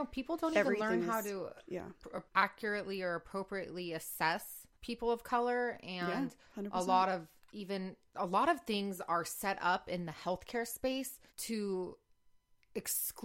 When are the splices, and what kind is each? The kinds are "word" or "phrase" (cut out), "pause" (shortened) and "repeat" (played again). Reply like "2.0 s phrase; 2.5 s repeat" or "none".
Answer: 2.3 s pause; 4.7 s pause; 11.3 s pause